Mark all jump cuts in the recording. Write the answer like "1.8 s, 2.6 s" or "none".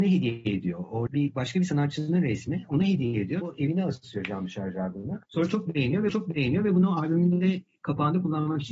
1.1 s, 3.4 s, 5.2 s, 6.1 s